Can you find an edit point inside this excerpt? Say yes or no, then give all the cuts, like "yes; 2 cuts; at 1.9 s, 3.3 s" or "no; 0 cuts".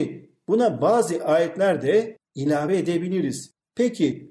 no; 0 cuts